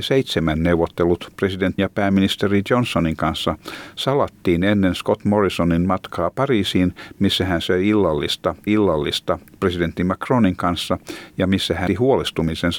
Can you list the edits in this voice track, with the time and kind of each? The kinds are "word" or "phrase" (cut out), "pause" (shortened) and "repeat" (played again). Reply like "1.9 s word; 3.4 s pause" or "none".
1.8 s word; 8.7 s repeat; 11.9 s word